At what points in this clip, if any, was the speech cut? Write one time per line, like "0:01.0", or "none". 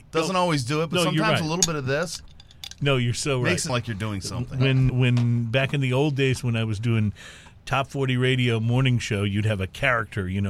0:03.7
0:04.9